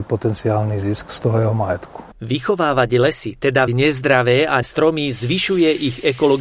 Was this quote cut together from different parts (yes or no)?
yes